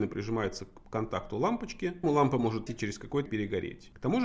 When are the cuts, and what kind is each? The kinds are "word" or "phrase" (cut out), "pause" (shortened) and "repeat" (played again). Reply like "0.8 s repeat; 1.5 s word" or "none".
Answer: 2.0 s word; 2.7 s word; 3.3 s word